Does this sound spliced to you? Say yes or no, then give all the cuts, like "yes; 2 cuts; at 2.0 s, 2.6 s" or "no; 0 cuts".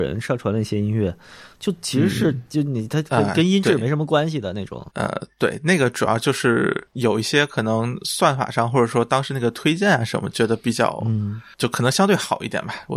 yes; 1 cut; at 4.9 s